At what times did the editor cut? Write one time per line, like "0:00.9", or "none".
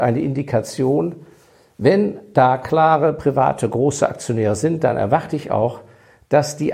none